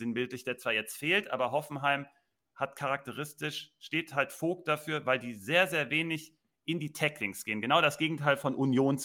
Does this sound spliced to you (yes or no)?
no